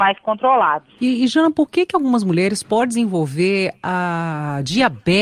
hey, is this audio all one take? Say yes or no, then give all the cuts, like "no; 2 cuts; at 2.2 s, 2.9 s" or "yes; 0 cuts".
yes; 0 cuts